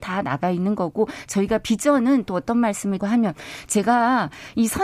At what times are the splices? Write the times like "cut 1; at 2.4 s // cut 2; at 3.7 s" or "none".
cut 1; at 3.0 s